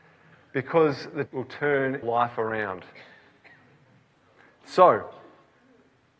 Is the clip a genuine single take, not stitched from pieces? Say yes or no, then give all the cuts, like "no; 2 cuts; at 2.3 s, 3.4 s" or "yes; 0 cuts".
no; 2 cuts; at 1.3 s, 2.0 s